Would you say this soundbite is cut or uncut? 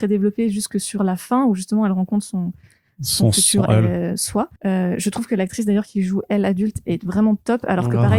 cut